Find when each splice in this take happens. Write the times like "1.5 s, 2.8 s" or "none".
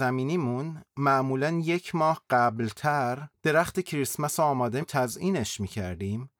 3.3 s, 4.8 s